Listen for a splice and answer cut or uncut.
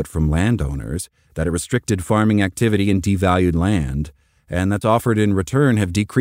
cut